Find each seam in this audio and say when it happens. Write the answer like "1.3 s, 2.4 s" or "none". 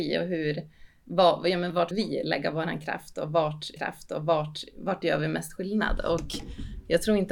1.9 s, 3.8 s